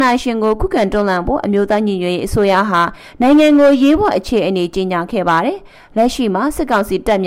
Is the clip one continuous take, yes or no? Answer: yes